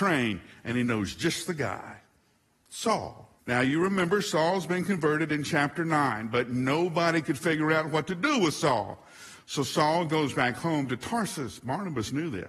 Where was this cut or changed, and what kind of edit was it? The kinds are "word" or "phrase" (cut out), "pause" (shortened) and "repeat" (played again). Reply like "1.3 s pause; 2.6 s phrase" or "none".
3.4 s pause